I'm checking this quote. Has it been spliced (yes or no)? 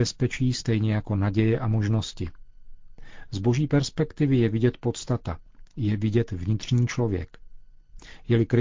no